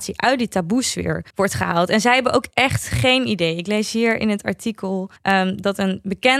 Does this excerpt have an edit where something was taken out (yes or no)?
yes